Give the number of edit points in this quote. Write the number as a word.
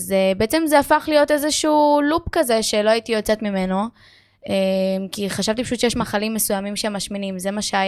zero